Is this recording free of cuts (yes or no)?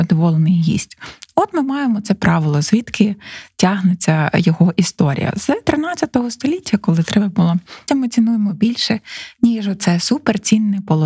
no